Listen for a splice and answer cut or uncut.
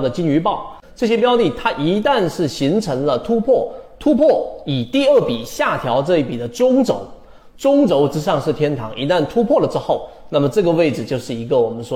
uncut